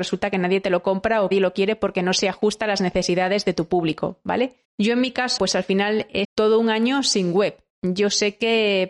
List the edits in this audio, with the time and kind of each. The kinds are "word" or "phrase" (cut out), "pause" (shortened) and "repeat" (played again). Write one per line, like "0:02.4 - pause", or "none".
0:01.3 - phrase
0:04.6 - pause
0:05.4 - word
0:06.2 - word
0:07.7 - pause